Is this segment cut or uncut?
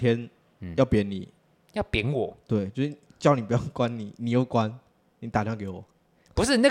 uncut